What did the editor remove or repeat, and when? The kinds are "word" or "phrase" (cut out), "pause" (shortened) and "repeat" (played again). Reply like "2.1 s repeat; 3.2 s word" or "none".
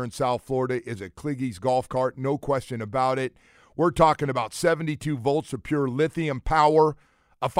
none